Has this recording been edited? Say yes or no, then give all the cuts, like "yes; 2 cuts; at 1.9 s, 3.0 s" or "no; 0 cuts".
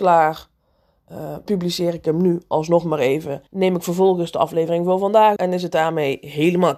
yes; 3 cuts; at 1.5 s, 3.5 s, 5.4 s